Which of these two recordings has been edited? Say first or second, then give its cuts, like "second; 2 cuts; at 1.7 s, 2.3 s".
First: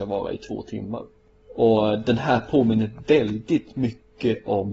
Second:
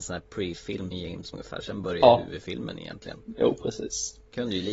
second; 2 cuts; at 0.9 s, 1.3 s